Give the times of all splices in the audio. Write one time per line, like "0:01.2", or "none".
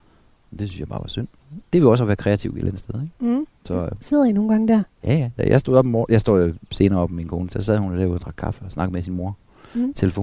0:01.6
0:03.6

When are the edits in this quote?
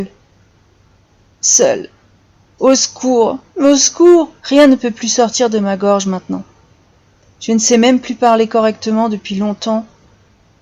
0:02.2
0:03.5
0:04.4

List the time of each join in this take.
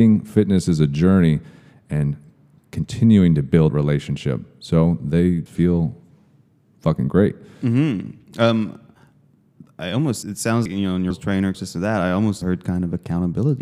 0:03.7
0:05.5
0:10.2
0:10.7
0:11.1
0:11.5
0:12.4

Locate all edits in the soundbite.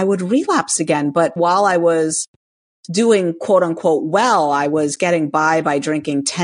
0:01.4

